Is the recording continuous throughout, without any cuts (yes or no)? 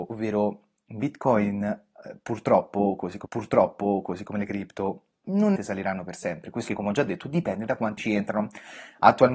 no